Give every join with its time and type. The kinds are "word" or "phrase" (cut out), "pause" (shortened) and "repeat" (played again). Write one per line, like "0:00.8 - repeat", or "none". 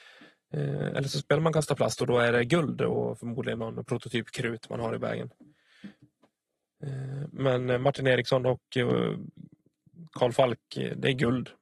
none